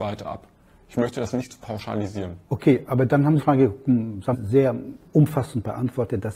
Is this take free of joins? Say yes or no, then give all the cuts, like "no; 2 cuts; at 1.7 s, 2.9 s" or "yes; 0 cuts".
no; 3 cuts; at 2.4 s, 3.4 s, 4.3 s